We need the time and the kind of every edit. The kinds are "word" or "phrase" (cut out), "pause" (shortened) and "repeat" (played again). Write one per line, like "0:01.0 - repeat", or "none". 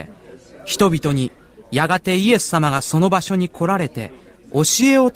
none